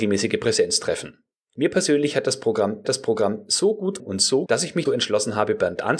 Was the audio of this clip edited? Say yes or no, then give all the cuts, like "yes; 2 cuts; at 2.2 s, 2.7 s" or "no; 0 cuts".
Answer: yes; 5 cuts; at 1.4 s, 2.8 s, 4.0 s, 4.5 s, 4.9 s